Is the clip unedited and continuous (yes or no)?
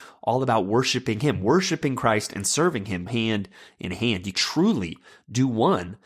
no